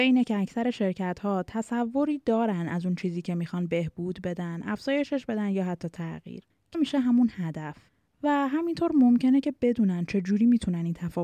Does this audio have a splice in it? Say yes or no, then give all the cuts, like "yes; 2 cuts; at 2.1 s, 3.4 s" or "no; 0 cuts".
yes; 1 cut; at 6.7 s